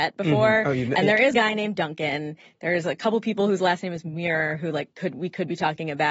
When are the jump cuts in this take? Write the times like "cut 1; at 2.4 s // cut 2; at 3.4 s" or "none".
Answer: cut 1; at 1.3 s